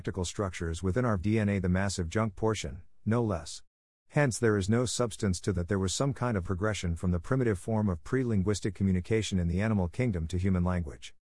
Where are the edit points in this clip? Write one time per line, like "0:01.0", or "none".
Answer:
0:01.2
0:05.6
0:06.4